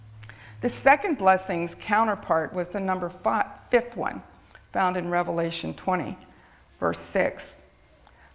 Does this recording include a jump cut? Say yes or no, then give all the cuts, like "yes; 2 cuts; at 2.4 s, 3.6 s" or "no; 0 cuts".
no; 0 cuts